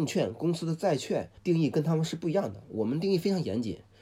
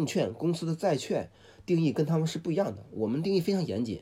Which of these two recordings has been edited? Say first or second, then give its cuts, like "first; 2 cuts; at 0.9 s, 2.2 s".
first; 1 cut; at 1.4 s